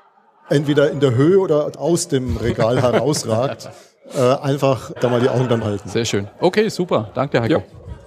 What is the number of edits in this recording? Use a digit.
3